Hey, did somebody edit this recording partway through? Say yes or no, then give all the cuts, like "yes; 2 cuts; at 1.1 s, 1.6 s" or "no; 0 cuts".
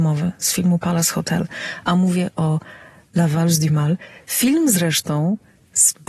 no; 0 cuts